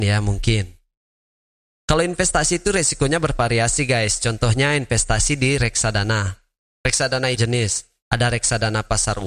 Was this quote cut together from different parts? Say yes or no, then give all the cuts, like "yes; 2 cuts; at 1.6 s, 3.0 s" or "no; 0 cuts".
yes; 1 cut; at 7.4 s